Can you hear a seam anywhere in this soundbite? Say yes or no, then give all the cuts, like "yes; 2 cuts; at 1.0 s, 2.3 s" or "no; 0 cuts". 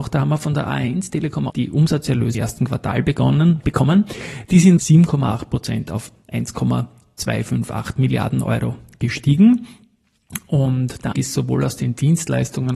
yes; 4 cuts; at 1.5 s, 2.3 s, 4.8 s, 11.1 s